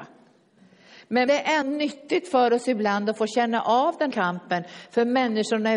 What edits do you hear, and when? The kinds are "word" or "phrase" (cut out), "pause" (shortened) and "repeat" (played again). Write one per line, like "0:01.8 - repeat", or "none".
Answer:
0:01.3 - word
0:01.6 - word
0:04.1 - word